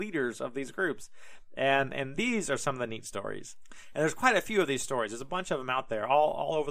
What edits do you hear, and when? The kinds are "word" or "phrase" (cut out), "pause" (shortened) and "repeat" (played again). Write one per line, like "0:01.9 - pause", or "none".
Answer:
none

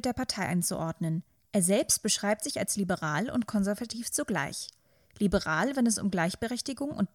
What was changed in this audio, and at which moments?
none

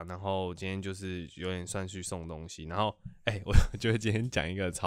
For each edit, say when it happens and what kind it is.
none

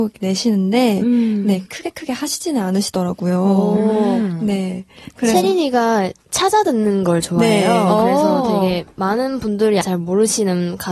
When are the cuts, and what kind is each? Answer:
0:01.7 - phrase
0:09.8 - word

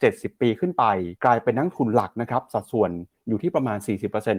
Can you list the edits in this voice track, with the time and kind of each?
0:01.2 - pause

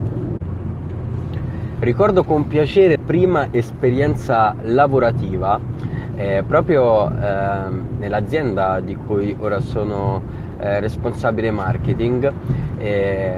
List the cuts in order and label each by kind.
0:02.9 - phrase

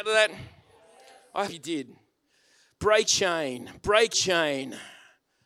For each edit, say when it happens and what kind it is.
0:01.5 - word
0:03.1 - word
0:04.1 - word

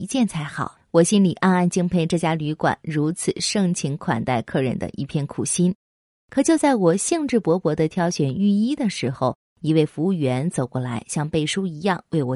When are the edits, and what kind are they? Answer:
none

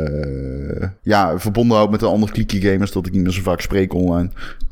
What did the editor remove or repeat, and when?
0:01.0 - pause

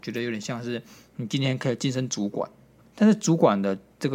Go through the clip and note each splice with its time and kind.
0:02.8 - pause

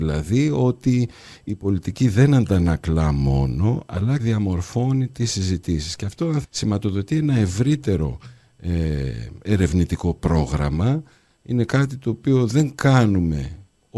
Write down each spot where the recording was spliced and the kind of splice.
0:04.2 - word
0:06.4 - word

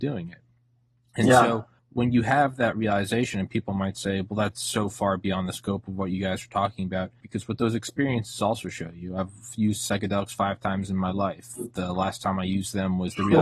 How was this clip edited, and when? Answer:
0:01.8 - pause
0:07.2 - phrase

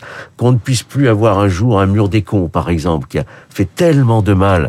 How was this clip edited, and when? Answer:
none

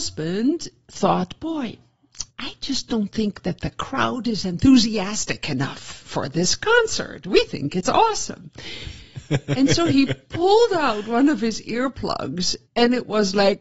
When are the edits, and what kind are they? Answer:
0:02.3 - pause
0:12.7 - pause

